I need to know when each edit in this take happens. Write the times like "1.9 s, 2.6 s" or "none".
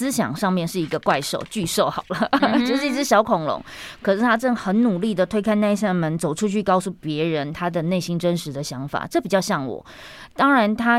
none